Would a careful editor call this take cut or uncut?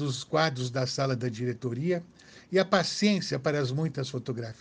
uncut